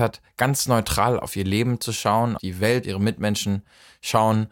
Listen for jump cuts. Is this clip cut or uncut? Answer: cut